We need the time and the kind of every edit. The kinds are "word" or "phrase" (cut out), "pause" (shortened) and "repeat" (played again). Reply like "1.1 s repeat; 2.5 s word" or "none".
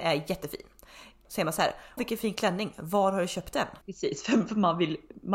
1.2 s word; 2.0 s word; 3.8 s pause